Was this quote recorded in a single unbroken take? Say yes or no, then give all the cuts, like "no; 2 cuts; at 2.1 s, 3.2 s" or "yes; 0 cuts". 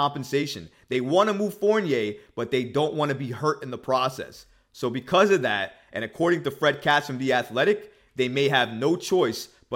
yes; 0 cuts